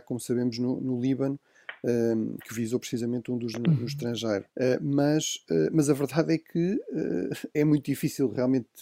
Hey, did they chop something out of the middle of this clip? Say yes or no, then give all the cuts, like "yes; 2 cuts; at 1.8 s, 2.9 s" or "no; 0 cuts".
yes; 3 cuts; at 3.5 s, 4.5 s, 7.5 s